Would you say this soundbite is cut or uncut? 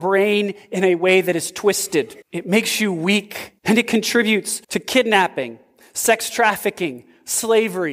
cut